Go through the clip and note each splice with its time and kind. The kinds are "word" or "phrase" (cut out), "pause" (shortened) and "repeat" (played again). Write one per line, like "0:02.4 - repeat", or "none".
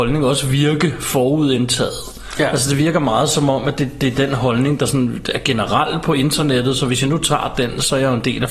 none